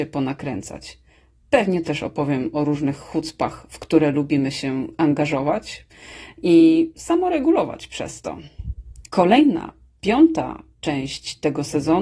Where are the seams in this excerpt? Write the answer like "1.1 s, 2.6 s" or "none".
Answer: 1.8 s, 9.1 s